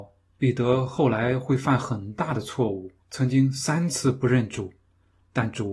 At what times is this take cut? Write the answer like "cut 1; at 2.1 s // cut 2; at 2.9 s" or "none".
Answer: cut 1; at 3.0 s